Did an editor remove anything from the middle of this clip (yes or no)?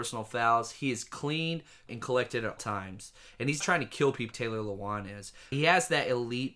yes